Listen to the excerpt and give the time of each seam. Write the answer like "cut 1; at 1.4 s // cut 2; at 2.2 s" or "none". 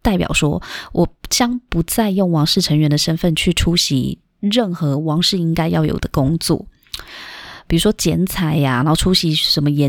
cut 1; at 4.3 s